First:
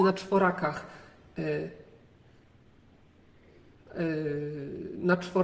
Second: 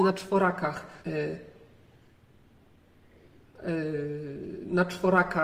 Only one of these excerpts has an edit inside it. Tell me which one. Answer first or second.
second